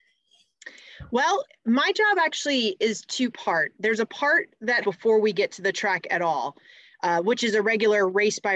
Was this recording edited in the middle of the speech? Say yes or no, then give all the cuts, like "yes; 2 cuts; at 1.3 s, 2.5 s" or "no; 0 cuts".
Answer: yes; 2 cuts; at 1.5 s, 4.8 s